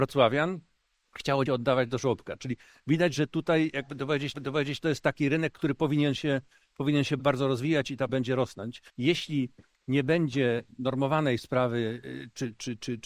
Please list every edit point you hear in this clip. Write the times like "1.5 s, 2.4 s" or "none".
1.5 s, 4.3 s, 7.2 s, 8.1 s, 8.9 s